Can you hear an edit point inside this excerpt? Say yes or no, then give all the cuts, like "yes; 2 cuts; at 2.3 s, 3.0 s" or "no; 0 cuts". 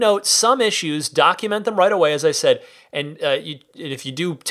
no; 0 cuts